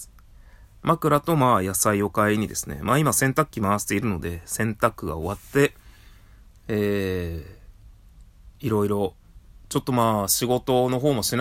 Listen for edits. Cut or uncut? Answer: uncut